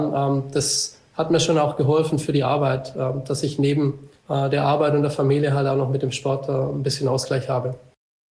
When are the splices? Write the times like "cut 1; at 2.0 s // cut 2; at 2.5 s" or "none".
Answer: cut 1; at 4.2 s